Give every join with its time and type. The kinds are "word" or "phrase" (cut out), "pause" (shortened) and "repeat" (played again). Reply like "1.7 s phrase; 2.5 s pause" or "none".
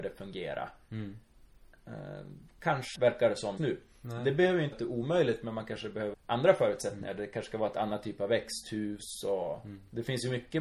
2.9 s word; 3.6 s word; 4.7 s word; 6.1 s word